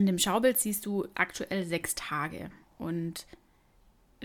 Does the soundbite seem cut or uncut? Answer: cut